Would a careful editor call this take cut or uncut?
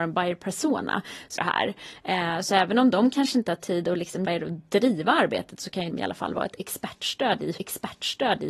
cut